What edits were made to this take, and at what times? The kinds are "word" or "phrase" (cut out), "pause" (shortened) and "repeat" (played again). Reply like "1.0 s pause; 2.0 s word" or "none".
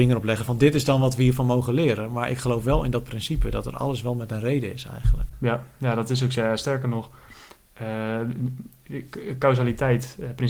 none